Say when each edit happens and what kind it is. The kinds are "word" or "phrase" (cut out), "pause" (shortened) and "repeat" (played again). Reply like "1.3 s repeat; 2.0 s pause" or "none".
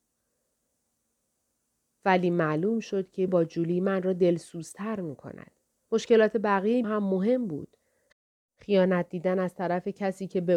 3.3 s word; 6.8 s word